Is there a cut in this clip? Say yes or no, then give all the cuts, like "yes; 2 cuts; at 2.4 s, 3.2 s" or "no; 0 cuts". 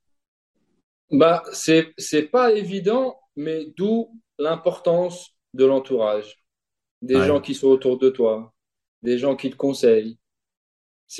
no; 0 cuts